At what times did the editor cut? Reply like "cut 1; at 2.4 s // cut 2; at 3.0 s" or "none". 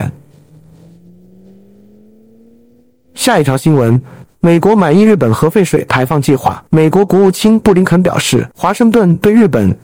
cut 1; at 6.7 s // cut 2; at 8.5 s

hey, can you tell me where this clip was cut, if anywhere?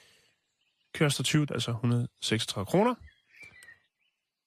cut 1; at 1.5 s

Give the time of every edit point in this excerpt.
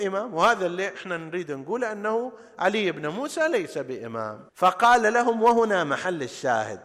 cut 1; at 4.5 s

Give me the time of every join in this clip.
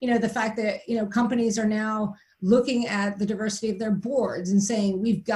none

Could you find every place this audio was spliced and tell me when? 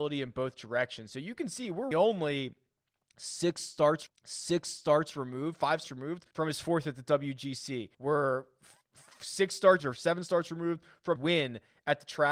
cut 1; at 1.9 s // cut 2; at 4.1 s // cut 3; at 5.8 s // cut 4; at 6.3 s // cut 5; at 7.9 s // cut 6; at 8.8 s // cut 7; at 9.8 s // cut 8; at 11.2 s

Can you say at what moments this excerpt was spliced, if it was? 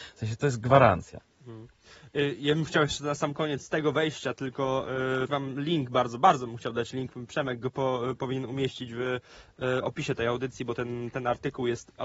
cut 1; at 5.3 s

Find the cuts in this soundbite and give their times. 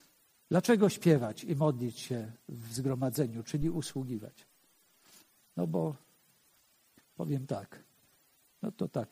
none

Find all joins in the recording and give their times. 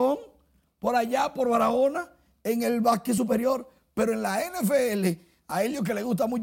none

